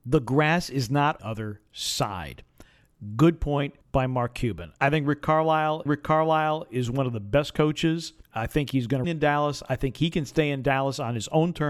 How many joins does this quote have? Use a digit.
6